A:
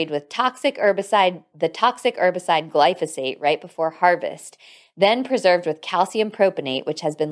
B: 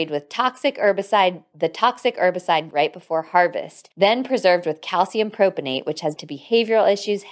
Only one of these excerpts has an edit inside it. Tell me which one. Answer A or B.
B